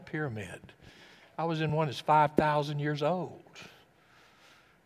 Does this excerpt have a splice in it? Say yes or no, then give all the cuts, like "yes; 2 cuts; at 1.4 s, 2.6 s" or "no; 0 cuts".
no; 0 cuts